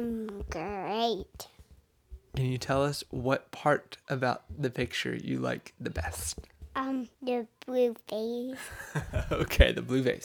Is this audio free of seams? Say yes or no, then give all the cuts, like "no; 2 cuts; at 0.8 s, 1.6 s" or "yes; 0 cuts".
no; 1 cut; at 7.1 s